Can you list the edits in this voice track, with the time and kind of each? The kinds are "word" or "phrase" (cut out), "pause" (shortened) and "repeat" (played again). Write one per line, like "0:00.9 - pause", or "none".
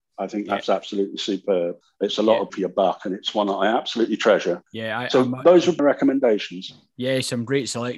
0:01.8 - pause
0:02.5 - word
0:04.7 - pause
0:05.8 - word